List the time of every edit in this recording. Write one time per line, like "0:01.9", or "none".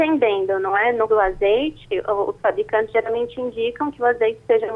0:01.1